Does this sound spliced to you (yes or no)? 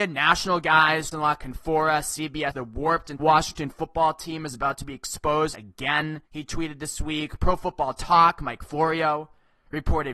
yes